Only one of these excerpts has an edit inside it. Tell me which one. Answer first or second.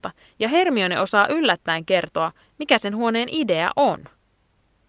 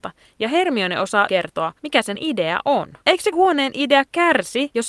second